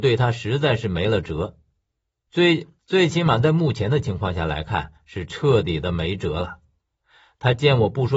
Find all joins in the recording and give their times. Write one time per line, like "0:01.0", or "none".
0:02.8